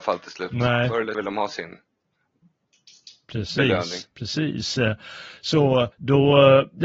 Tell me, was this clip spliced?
yes; 3 cuts; at 1.1 s, 4.1 s, 5.9 s

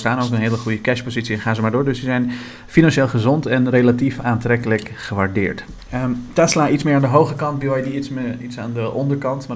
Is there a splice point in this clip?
no; 0 cuts

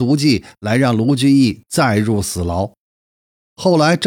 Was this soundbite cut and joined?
no; 0 cuts

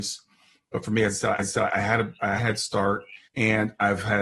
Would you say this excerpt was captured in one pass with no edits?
no; 3 cuts; at 1.4 s, 2.4 s, 3.2 s

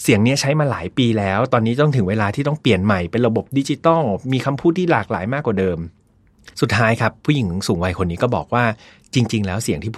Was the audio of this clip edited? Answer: yes; 1 cut; at 6.5 s

